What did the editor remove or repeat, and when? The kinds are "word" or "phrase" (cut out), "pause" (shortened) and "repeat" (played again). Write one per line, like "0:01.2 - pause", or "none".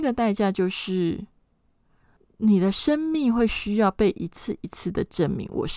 none